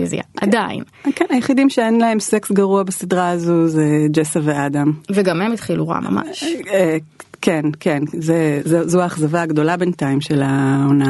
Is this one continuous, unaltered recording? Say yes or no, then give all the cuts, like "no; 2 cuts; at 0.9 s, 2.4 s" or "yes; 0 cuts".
no; 1 cut; at 8.6 s